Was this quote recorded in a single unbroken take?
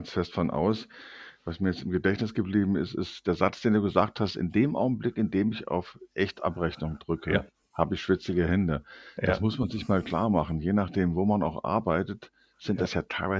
yes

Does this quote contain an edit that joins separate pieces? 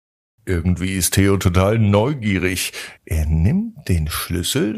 yes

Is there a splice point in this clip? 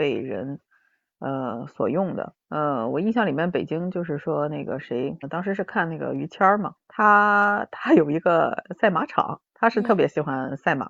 yes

